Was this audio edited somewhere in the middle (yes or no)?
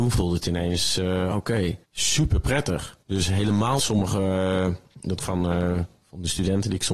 yes